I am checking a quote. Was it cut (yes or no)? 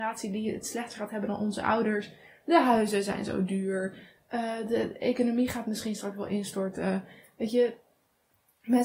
no